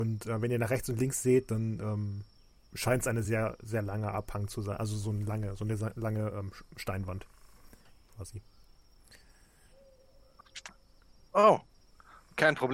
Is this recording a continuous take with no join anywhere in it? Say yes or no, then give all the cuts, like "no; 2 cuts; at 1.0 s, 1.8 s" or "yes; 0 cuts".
yes; 0 cuts